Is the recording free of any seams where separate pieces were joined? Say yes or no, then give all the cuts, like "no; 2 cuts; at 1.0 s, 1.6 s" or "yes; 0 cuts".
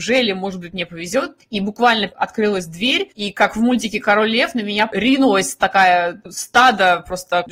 yes; 0 cuts